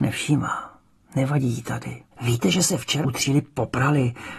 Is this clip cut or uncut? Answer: cut